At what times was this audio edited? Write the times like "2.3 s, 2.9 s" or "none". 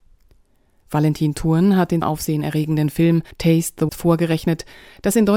2.0 s, 3.3 s, 3.9 s